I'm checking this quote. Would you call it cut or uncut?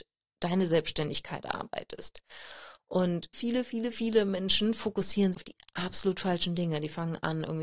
cut